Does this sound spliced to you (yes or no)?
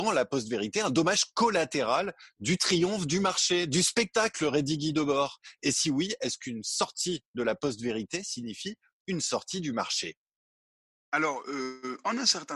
no